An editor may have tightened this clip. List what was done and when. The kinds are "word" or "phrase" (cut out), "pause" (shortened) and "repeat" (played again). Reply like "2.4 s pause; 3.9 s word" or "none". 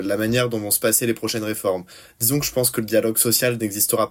none